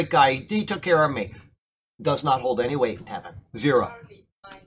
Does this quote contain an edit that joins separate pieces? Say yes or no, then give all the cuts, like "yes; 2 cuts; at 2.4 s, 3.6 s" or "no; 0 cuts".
no; 0 cuts